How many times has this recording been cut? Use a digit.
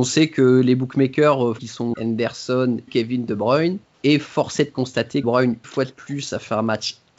6